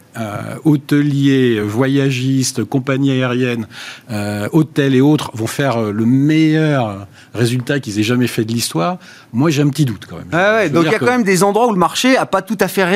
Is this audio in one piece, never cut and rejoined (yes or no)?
yes